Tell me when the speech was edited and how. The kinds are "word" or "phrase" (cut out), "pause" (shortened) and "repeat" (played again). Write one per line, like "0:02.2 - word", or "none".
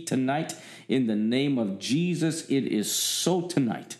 none